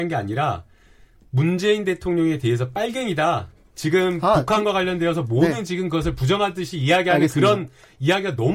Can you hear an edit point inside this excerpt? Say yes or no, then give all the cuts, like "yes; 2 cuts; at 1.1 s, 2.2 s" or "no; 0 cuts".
no; 0 cuts